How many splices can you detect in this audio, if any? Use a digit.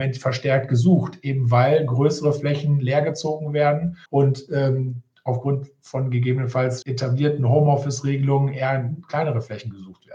2